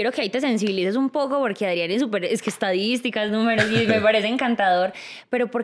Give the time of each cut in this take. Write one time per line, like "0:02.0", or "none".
none